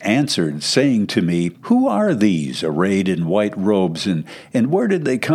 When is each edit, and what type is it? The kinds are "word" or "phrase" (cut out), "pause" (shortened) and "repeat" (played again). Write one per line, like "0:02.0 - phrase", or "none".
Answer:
0:01.6 - pause